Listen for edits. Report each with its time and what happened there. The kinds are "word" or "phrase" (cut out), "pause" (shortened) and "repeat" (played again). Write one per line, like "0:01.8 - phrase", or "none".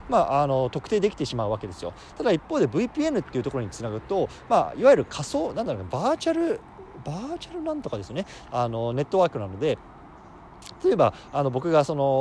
none